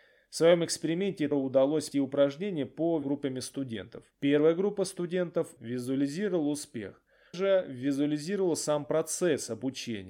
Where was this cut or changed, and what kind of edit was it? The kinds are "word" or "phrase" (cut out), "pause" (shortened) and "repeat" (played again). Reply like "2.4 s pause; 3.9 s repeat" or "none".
1.3 s word; 1.9 s word; 3.0 s phrase; 4.1 s pause; 5.6 s word; 7.3 s word